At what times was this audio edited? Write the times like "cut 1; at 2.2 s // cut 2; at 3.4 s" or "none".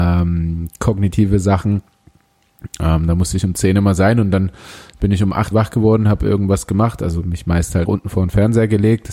cut 1; at 5.5 s // cut 2; at 7.9 s